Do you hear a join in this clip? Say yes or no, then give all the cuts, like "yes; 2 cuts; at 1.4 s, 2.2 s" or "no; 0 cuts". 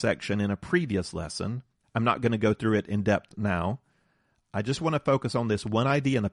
no; 0 cuts